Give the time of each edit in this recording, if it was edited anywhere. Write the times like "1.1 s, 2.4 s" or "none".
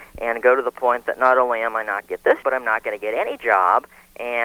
2.0 s, 2.4 s